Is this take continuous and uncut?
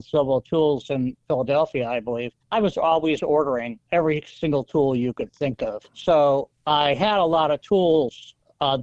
no; 3 cuts; at 2.4 s, 3.8 s, 5.9 s

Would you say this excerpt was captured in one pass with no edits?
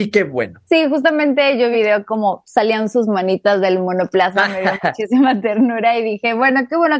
no; 1 cut; at 1.7 s

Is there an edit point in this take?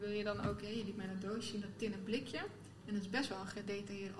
no; 0 cuts

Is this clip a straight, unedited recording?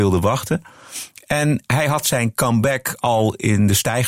yes; 0 cuts

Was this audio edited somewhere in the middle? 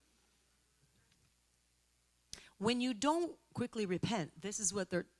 no; 0 cuts

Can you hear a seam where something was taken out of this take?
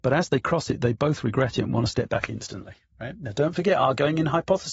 no; 0 cuts

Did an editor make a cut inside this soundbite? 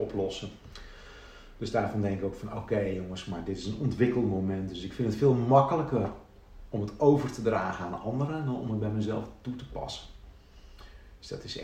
no; 0 cuts

